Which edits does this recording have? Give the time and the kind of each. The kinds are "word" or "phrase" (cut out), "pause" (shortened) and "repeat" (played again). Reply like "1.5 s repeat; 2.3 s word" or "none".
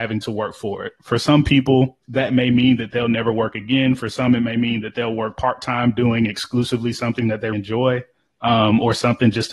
2.0 s pause; 7.5 s word